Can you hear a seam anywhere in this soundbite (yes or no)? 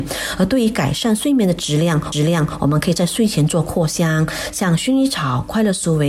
yes